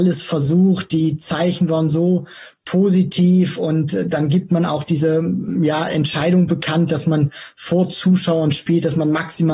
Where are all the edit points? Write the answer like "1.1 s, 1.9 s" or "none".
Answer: none